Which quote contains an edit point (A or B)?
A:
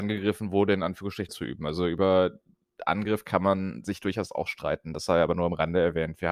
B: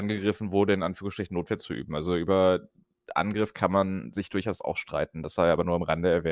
A